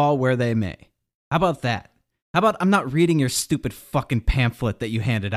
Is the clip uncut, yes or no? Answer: yes